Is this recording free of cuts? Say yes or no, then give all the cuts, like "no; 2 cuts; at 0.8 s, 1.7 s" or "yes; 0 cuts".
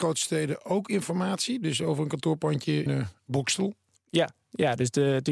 no; 1 cut; at 2.9 s